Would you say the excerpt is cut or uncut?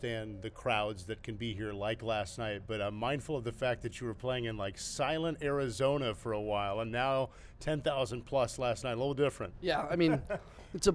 uncut